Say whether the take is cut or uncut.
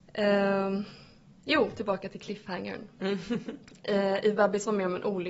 uncut